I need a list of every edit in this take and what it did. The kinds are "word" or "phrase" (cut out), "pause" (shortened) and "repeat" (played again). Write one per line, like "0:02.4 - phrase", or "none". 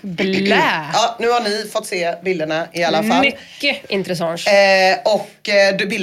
none